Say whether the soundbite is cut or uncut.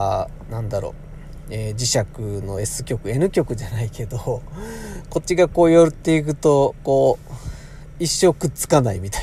uncut